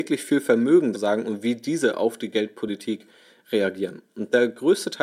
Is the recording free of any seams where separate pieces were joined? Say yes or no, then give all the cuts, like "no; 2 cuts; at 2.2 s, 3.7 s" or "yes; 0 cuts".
no; 1 cut; at 0.9 s